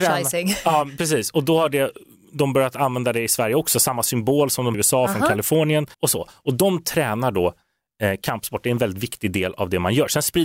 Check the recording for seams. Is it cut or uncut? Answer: cut